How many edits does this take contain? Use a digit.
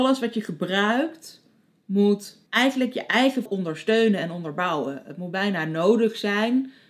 2